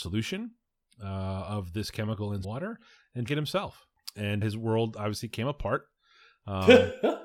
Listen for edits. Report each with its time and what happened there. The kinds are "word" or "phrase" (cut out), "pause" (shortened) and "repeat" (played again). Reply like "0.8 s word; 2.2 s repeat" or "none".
2.4 s word; 3.3 s word; 4.4 s word

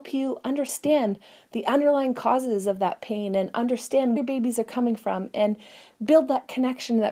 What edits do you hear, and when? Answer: 4.2 s word

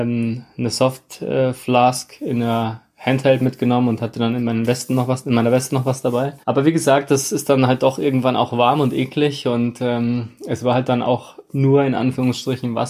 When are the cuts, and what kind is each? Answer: 6.4 s pause

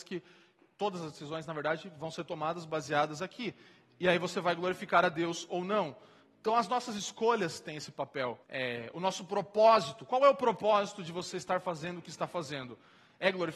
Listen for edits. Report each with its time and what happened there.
8.4 s pause

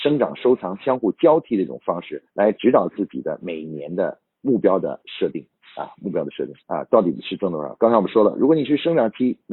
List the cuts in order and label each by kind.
2.3 s pause; 6.6 s pause

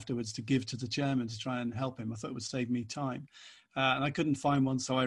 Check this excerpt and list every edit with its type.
none

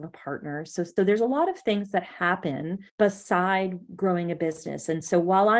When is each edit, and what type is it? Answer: 1.0 s word; 2.9 s pause

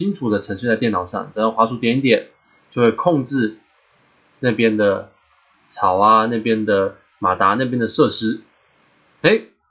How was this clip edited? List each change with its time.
none

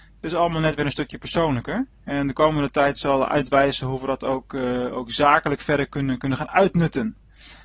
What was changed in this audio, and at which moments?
1.9 s pause

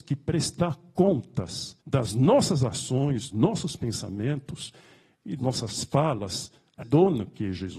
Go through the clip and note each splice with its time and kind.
1.8 s pause; 3.3 s word; 5.4 s word; 6.8 s word

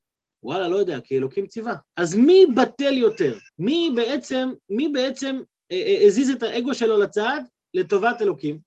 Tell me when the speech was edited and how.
1.9 s pause; 3.5 s pause

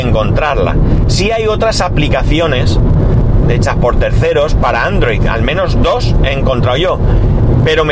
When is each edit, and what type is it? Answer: none

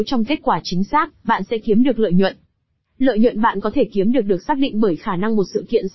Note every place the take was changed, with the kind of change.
none

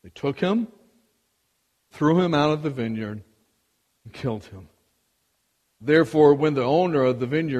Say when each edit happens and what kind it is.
1.9 s word

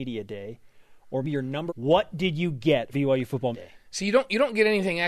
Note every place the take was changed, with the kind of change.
1.2 s word; 1.7 s phrase; 2.9 s word; 3.5 s word

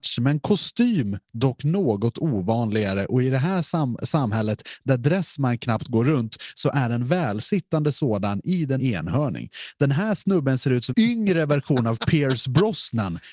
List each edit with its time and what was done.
8.8 s phrase; 10.9 s word

